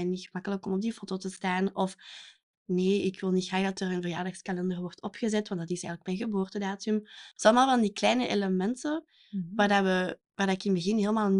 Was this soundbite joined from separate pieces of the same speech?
no; 0 cuts

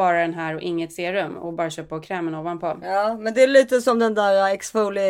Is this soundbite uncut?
yes; 0 cuts

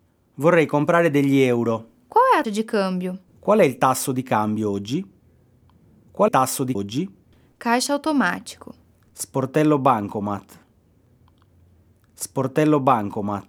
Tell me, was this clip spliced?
yes; 4 cuts; at 2.4 s, 3.3 s, 6.3 s, 6.7 s

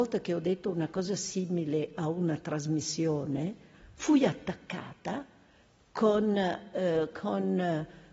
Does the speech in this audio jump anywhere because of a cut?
no; 0 cuts

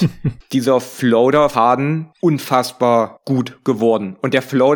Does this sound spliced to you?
yes; 2 cuts; at 1.5 s, 2.1 s

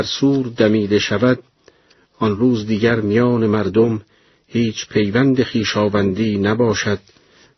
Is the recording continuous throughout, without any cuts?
yes; 0 cuts

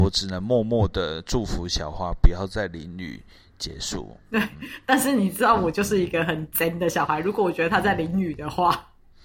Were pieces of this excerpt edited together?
no; 0 cuts

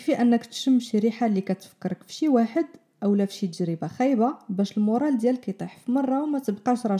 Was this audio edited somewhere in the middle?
no; 0 cuts

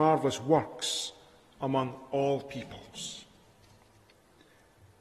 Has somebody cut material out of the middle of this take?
no; 0 cuts

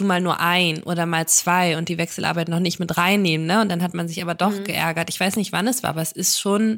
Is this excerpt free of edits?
yes; 0 cuts

